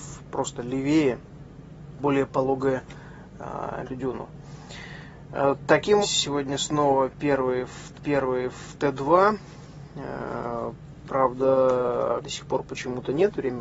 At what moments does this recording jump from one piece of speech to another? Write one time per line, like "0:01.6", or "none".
0:02.0
0:03.8
0:06.0
0:07.9
0:12.2